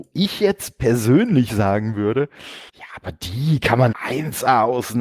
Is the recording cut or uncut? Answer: cut